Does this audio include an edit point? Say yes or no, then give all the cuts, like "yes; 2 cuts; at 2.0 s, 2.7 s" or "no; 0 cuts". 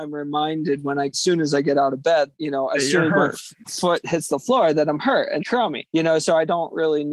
yes; 5 cuts; at 1.1 s, 2.3 s, 3.6 s, 5.4 s, 5.9 s